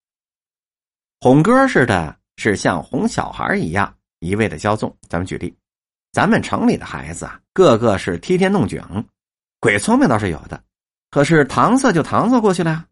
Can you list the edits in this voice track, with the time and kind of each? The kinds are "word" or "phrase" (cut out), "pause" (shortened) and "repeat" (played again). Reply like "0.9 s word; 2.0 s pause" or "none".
5.0 s pause; 5.9 s pause; 7.5 s pause